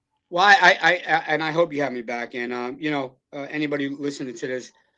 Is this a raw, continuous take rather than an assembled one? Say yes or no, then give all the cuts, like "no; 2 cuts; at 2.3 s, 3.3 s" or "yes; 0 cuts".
yes; 0 cuts